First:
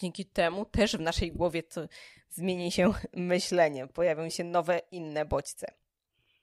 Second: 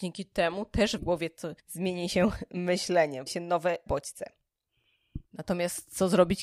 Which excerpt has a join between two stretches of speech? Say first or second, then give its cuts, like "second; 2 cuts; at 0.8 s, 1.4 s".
second; 5 cuts; at 1.0 s, 1.6 s, 3.3 s, 3.9 s, 5.3 s